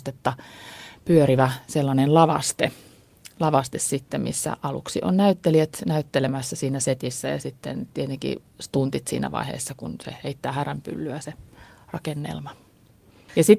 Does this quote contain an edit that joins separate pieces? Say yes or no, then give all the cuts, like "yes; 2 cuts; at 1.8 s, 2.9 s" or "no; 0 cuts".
no; 0 cuts